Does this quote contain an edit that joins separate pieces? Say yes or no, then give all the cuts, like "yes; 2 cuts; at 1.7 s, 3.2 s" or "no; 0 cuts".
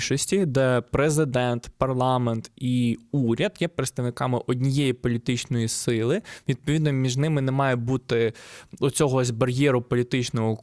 no; 0 cuts